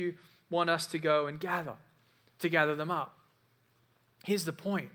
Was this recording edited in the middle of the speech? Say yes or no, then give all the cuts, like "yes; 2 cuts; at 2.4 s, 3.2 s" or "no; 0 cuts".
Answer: no; 0 cuts